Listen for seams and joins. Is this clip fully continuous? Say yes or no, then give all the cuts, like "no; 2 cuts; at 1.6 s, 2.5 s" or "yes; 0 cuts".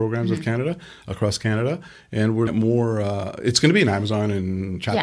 no; 1 cut; at 2.5 s